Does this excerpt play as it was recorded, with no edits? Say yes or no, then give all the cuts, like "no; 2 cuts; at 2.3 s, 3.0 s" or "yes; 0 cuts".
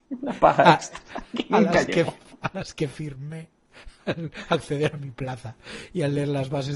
yes; 0 cuts